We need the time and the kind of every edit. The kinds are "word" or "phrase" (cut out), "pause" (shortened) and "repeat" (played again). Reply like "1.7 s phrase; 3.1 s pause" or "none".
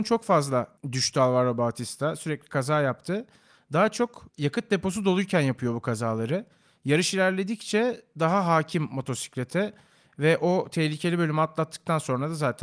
none